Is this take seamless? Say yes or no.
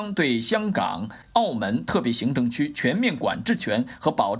no